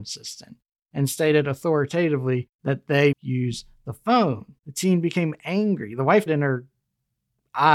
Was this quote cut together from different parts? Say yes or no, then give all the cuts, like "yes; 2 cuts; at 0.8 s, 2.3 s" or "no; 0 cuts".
yes; 4 cuts; at 2.5 s, 3.1 s, 4.6 s, 6.3 s